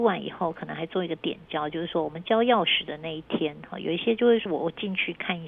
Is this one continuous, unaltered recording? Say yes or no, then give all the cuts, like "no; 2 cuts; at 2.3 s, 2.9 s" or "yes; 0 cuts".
no; 1 cut; at 4.5 s